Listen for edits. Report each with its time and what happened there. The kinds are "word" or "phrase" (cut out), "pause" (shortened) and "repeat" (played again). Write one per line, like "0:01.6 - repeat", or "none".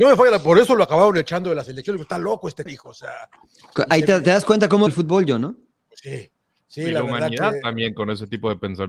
0:02.7 - word
0:04.9 - word